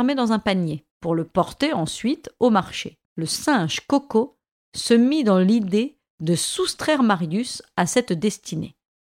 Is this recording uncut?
no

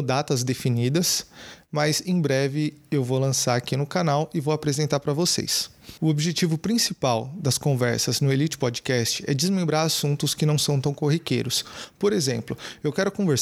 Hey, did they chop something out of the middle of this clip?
no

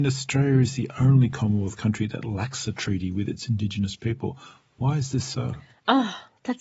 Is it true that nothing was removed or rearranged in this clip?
yes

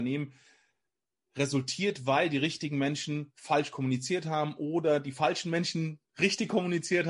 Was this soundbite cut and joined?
no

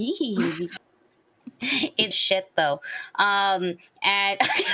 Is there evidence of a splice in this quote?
yes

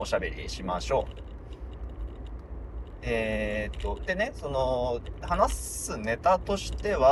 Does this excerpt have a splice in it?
yes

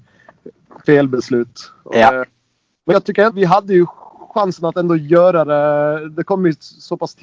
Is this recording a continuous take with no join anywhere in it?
no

